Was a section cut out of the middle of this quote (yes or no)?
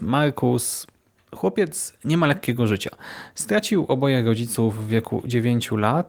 no